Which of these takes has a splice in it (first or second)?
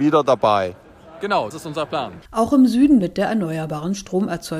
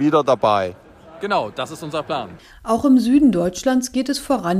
first